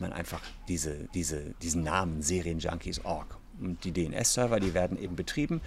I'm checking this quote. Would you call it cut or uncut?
cut